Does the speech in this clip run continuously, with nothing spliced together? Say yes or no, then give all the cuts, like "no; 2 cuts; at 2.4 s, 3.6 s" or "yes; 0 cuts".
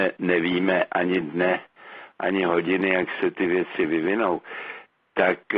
yes; 0 cuts